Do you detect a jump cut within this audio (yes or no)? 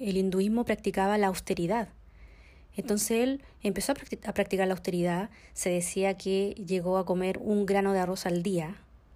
no